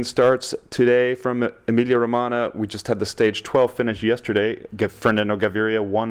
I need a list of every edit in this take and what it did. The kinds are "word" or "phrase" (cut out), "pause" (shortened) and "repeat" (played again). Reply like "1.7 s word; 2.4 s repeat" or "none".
none